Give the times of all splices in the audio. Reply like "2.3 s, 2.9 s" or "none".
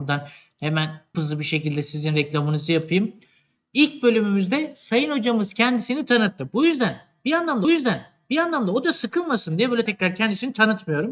1.1 s, 7.6 s, 9.9 s